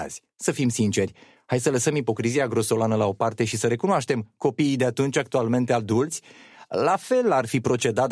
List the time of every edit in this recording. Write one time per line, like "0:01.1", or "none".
none

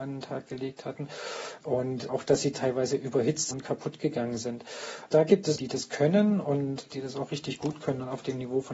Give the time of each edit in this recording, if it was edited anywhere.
0:02.1
0:03.5
0:05.6

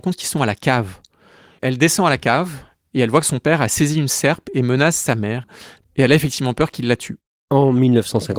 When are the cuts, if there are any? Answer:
none

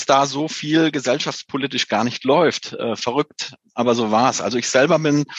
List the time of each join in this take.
none

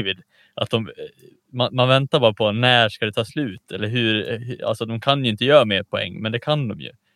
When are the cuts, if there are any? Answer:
none

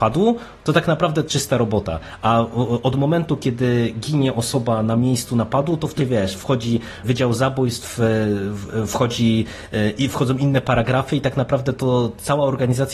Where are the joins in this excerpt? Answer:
0:01.3
0:06.0
0:07.0

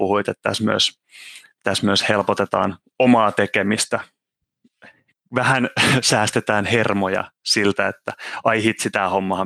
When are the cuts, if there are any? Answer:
none

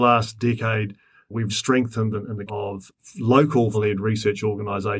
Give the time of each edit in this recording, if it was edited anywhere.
0:01.5
0:02.1
0:02.5
0:03.7

